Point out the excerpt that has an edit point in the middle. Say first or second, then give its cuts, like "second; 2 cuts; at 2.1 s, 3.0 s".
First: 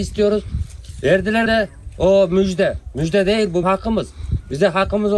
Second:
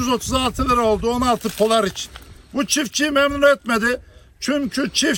first; 2 cuts; at 1.5 s, 3.6 s